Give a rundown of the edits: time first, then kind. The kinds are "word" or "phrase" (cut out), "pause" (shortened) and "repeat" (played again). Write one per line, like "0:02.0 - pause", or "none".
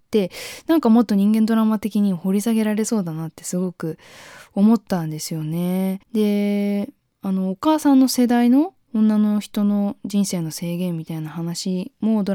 0:06.0 - pause